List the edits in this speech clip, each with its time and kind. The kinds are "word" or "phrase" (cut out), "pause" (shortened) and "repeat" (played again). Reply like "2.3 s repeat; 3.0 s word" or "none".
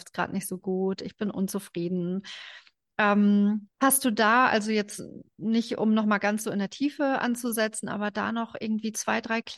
3.7 s pause